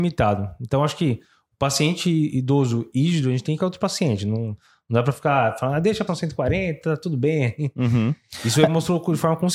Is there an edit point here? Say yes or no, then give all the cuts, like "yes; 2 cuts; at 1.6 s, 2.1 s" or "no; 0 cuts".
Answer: yes; 2 cuts; at 3.6 s, 6.1 s